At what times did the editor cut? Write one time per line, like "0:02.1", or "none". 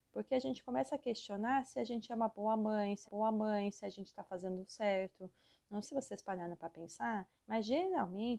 0:03.0
0:05.8
0:07.4